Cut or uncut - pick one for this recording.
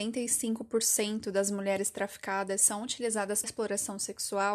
cut